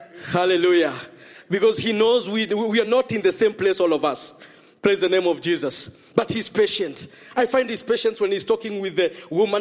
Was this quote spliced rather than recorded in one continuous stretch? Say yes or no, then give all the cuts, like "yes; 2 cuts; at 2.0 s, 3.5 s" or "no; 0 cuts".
no; 0 cuts